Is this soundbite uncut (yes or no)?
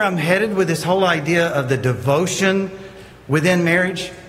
yes